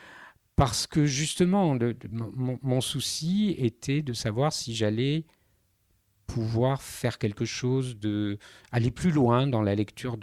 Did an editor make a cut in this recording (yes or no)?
no